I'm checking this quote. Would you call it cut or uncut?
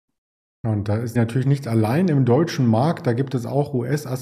cut